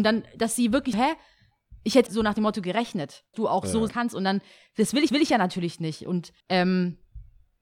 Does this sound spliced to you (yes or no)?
yes